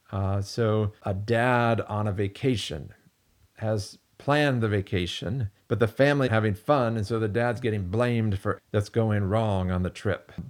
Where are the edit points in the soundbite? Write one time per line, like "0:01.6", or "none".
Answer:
0:01.0
0:03.4
0:05.6
0:06.3
0:08.6